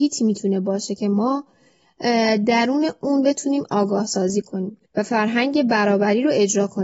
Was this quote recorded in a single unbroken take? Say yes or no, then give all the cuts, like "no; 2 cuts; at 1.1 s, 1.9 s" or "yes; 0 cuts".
no; 1 cut; at 4.9 s